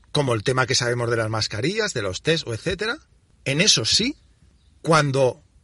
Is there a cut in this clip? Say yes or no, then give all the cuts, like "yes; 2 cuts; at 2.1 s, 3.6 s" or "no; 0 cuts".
no; 0 cuts